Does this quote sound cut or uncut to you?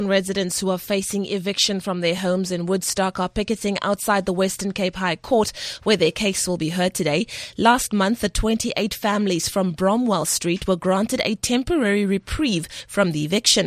uncut